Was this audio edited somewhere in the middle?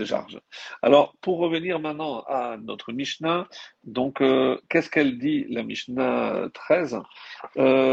no; 0 cuts

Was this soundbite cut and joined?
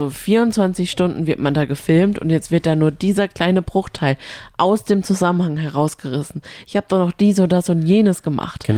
no; 0 cuts

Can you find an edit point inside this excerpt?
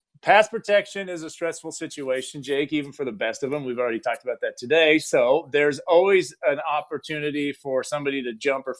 no; 0 cuts

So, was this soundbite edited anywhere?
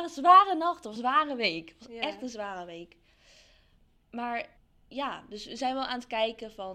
yes; 2 cuts; at 1.0 s, 4.6 s

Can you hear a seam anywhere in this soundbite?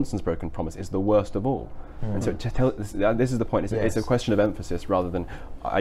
no; 0 cuts

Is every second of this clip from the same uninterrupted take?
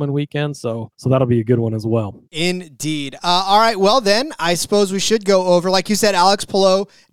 no; 2 cuts; at 0.9 s, 2.3 s

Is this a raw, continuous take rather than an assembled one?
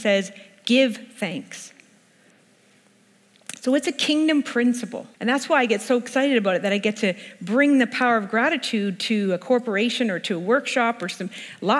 no; 1 cut; at 5.1 s

